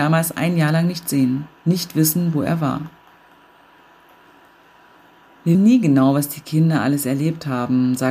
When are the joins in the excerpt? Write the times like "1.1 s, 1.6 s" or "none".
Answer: 1.5 s, 5.5 s